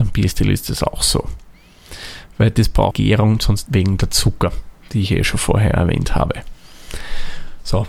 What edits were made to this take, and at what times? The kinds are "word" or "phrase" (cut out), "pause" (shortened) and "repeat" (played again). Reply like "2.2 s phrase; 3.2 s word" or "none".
2.9 s phrase; 3.7 s phrase